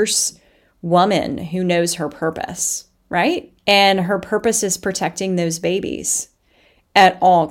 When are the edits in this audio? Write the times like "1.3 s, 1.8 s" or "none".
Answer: 3.6 s